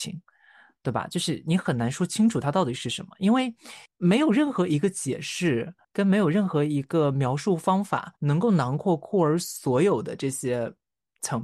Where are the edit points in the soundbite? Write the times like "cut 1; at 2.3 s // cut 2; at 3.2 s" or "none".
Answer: cut 1; at 3.9 s // cut 2; at 5.8 s // cut 3; at 8.2 s